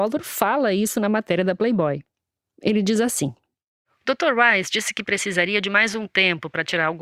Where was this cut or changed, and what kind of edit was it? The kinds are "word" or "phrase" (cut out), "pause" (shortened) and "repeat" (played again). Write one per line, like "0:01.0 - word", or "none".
none